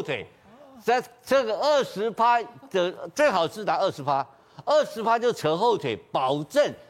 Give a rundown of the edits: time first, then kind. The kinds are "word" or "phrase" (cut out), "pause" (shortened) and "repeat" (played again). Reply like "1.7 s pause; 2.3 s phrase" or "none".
none